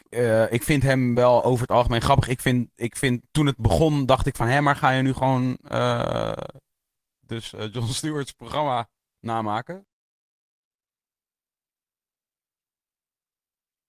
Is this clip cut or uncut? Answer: uncut